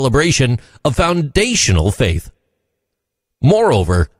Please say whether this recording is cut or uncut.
uncut